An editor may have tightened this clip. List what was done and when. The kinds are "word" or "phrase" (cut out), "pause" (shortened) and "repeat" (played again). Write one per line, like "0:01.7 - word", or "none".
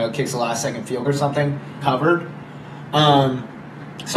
0:01.0 - word
0:01.8 - word